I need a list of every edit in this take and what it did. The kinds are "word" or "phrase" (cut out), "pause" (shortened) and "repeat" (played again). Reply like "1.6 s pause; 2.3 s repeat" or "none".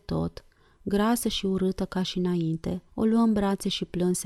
2.9 s pause